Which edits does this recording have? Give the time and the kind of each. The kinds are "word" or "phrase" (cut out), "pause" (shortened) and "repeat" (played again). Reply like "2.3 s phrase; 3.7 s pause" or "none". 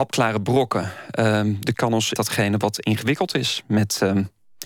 1.7 s word; 2.2 s phrase